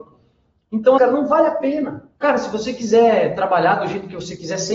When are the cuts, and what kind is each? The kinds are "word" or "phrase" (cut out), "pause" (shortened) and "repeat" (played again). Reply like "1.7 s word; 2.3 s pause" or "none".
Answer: 1.0 s word; 2.1 s pause